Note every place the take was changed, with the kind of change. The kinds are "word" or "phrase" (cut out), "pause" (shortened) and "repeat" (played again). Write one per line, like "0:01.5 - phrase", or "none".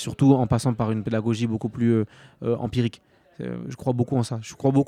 none